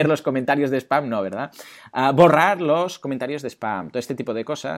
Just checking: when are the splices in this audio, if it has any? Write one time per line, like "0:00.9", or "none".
none